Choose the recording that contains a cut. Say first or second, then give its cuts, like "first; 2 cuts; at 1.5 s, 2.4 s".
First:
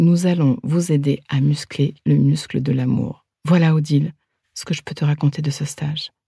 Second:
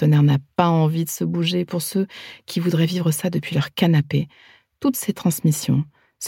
first; 1 cut; at 3.3 s